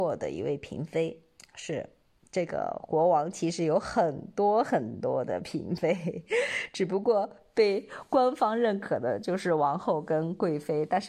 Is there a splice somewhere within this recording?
no; 0 cuts

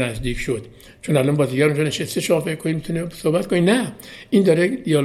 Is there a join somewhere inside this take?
no; 0 cuts

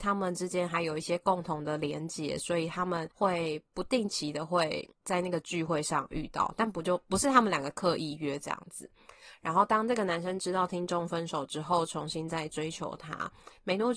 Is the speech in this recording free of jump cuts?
no; 2 cuts; at 3.1 s, 4.9 s

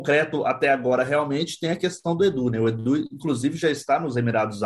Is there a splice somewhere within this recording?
no; 0 cuts

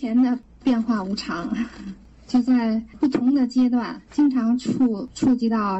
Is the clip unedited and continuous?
no; 1 cut; at 4.1 s

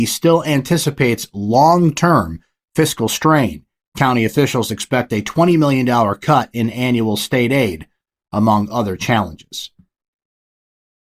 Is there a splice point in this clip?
no; 0 cuts

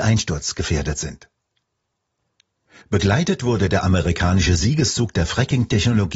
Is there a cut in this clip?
no; 0 cuts

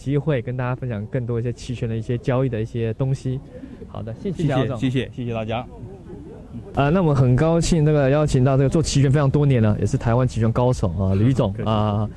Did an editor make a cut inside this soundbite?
yes; 1 cut; at 4.3 s

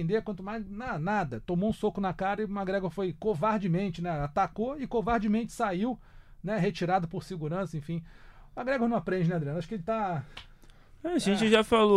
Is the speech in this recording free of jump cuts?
yes; 0 cuts

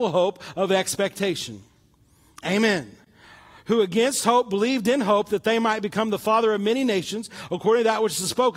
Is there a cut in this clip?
no; 0 cuts

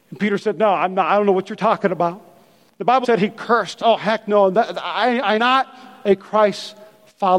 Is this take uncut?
no; 3 cuts; at 3.0 s, 3.8 s, 5.4 s

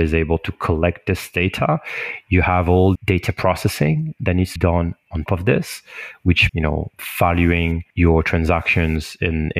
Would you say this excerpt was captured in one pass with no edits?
no; 5 cuts; at 3.0 s, 4.6 s, 5.3 s, 6.5 s, 7.9 s

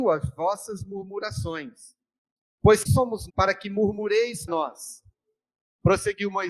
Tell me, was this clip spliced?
yes; 3 cuts; at 2.8 s, 3.3 s, 4.5 s

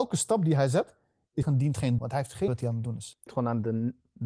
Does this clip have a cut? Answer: yes; 4 cuts; at 1.4 s, 2.0 s, 2.5 s, 3.3 s

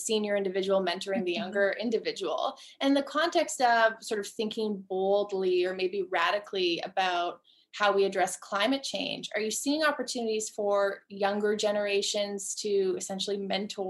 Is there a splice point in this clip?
no; 0 cuts

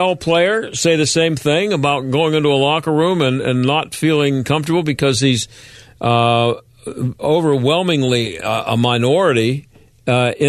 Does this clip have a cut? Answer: no; 0 cuts

